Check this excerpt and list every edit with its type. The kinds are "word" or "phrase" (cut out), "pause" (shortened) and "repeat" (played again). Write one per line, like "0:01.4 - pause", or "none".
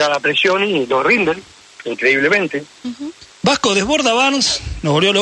0:03.3 - pause